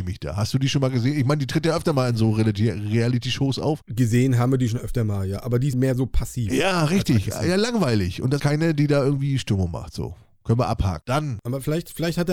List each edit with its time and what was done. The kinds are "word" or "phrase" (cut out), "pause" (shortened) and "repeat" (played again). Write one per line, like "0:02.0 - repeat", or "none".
0:05.7 - word
0:08.4 - word